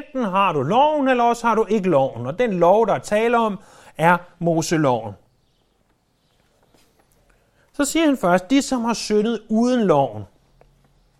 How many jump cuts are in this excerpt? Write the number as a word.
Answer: zero